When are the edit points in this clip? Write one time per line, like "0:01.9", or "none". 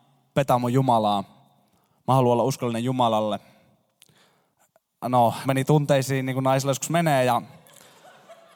0:05.4

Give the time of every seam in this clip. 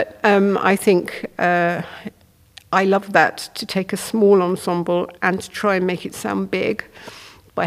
0:05.2

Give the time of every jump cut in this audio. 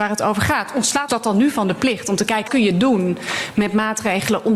0:01.1
0:02.5

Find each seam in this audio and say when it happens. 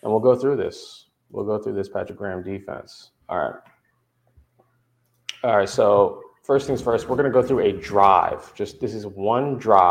0:03.2

